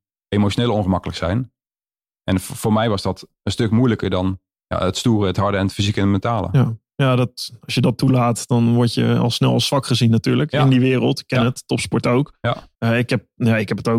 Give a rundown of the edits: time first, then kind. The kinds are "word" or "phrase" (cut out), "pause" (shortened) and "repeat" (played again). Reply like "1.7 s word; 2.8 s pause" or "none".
12.7 s pause